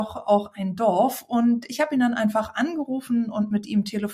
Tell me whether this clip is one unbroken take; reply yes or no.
yes